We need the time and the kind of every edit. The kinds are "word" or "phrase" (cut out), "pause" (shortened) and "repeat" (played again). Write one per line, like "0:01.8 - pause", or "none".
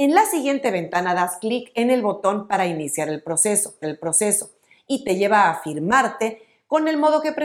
0:03.8 - repeat